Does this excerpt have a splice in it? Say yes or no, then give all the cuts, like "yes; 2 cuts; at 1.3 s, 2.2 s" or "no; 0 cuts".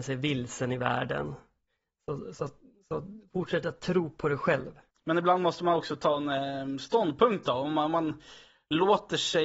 no; 0 cuts